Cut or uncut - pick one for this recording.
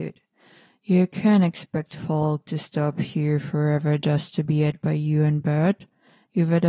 uncut